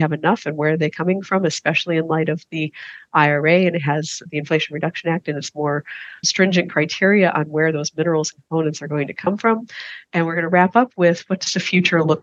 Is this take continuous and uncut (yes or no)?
yes